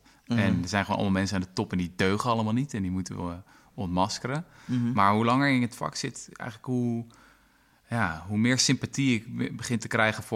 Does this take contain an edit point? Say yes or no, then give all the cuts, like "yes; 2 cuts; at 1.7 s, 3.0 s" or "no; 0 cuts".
no; 0 cuts